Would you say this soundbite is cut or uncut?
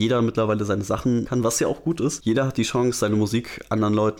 cut